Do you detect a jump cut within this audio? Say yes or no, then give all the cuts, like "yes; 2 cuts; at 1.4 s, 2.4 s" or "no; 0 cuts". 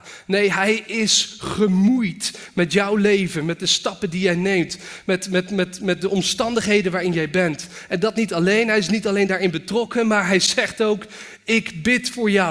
no; 0 cuts